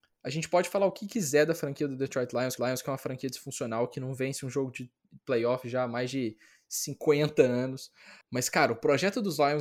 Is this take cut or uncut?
cut